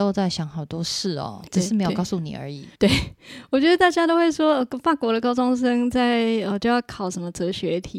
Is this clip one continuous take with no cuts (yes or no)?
no